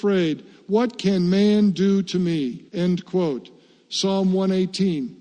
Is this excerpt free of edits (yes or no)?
no